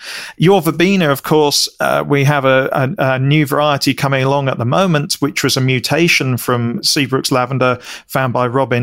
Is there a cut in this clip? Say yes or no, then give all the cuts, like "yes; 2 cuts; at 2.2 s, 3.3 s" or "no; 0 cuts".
no; 0 cuts